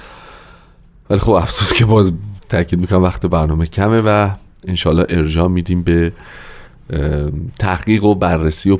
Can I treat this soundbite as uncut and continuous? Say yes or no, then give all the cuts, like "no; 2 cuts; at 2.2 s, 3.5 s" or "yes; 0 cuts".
yes; 0 cuts